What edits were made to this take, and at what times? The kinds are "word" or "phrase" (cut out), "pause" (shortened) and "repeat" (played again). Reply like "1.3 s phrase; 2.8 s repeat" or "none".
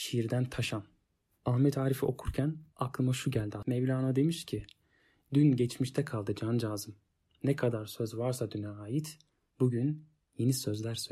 none

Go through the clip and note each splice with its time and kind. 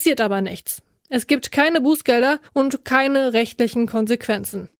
2.5 s pause

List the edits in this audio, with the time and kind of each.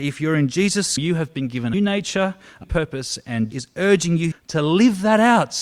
1.0 s word; 1.7 s word; 2.6 s word; 3.5 s word; 4.3 s word

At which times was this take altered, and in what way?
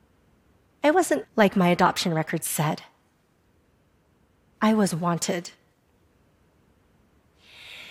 1.2 s word

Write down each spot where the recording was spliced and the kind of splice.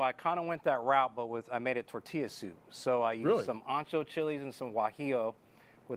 none

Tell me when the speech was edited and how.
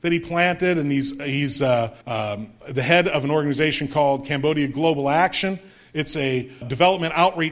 2.0 s pause; 6.6 s word

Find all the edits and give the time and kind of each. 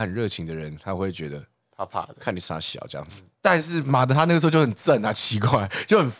none

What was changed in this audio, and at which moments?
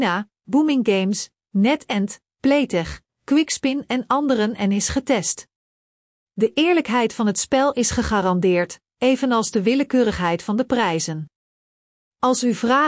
none

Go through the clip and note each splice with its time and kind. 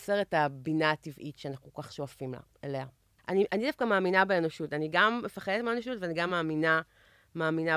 none

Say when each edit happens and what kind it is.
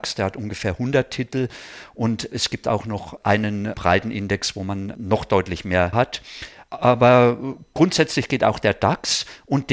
3.7 s word; 5.9 s word

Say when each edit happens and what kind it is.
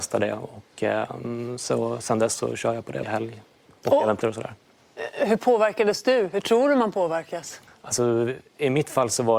3.0 s word; 4.2 s word; 7.7 s pause

